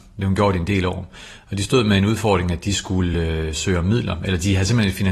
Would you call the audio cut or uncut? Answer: uncut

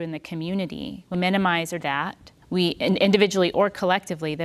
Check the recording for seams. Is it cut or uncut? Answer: cut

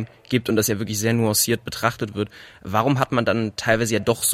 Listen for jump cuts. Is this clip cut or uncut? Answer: uncut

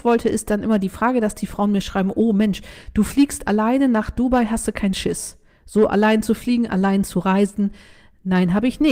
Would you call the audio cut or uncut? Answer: uncut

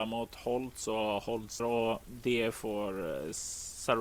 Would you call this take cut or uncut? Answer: cut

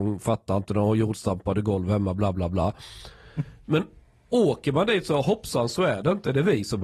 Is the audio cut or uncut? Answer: uncut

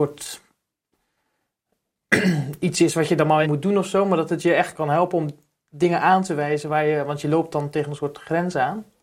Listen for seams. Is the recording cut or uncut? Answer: cut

